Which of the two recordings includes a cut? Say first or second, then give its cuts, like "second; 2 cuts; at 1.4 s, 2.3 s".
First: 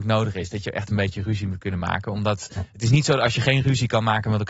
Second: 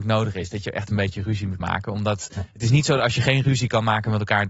second; 1 cut; at 1.6 s